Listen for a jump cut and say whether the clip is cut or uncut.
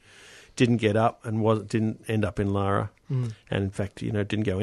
uncut